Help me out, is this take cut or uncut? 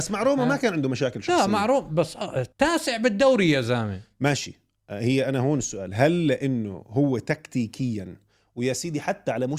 cut